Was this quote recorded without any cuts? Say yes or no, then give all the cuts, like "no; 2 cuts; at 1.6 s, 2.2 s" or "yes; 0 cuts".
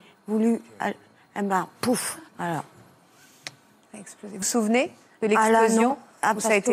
no; 2 cuts; at 2.3 s, 4.4 s